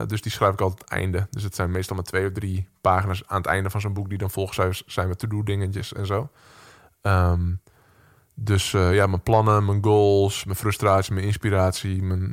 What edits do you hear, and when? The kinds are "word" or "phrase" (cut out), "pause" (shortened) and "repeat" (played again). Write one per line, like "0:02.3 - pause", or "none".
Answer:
none